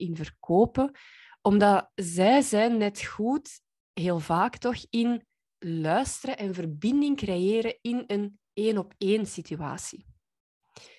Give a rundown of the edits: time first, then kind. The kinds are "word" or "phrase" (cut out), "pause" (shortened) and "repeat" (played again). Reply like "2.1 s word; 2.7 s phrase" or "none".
none